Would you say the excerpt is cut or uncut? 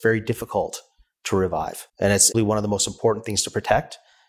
cut